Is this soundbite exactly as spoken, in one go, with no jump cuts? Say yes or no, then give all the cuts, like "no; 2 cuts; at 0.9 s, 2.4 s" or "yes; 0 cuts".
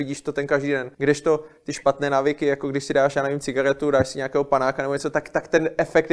no; 1 cut; at 0.9 s